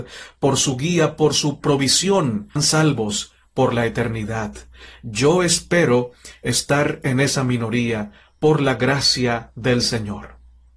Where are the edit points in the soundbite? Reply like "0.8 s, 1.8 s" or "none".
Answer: 2.6 s